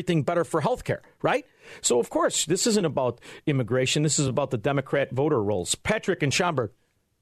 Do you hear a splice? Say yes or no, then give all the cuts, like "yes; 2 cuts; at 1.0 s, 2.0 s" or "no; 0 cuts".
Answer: no; 0 cuts